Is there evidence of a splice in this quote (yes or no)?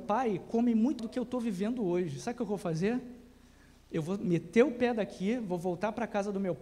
yes